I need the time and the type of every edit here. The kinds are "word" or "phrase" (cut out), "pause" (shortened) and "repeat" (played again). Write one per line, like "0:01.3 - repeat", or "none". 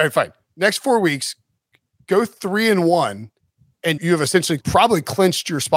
0:04.0 - word
0:04.6 - word